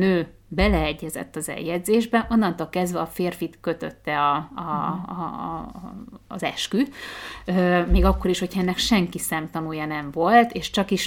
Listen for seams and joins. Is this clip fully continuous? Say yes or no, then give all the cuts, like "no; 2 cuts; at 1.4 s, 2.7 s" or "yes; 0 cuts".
yes; 0 cuts